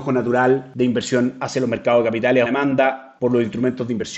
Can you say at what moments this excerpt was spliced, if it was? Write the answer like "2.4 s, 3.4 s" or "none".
2.5 s

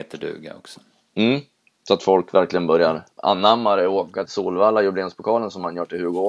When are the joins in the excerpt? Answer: 3.1 s, 4.3 s

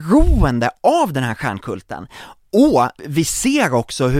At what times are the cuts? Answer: 3.0 s

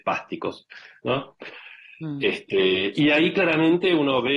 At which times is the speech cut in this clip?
none

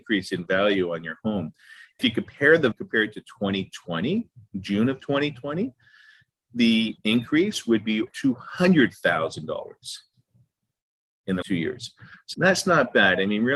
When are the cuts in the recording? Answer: 2.0 s, 2.7 s, 7.0 s, 8.1 s, 11.4 s, 12.3 s

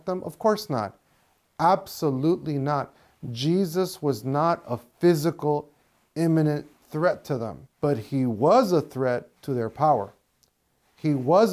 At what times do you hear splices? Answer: 7.7 s, 9.4 s

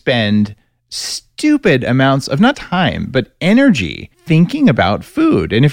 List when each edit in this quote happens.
2.5 s, 4.1 s

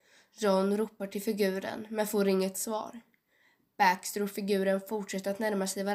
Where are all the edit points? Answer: none

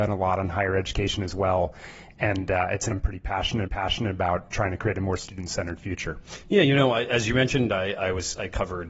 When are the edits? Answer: 2.9 s, 3.7 s

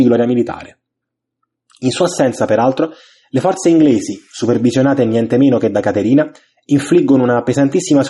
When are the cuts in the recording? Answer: none

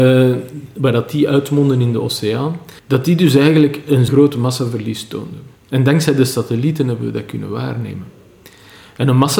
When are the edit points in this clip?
2.8 s, 4.1 s, 5.6 s

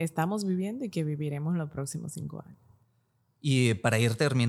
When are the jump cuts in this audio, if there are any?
none

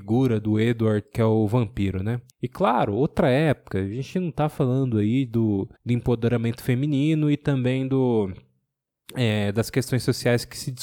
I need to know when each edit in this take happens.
2.3 s, 5.7 s

